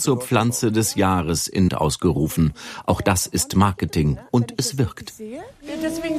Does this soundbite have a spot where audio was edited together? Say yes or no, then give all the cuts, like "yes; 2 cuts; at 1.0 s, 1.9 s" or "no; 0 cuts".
yes; 1 cut; at 1.7 s